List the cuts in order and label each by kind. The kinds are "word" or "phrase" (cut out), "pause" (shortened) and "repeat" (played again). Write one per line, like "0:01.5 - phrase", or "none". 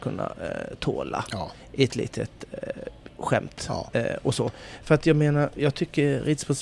none